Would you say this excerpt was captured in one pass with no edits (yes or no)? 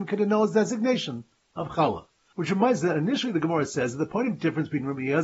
yes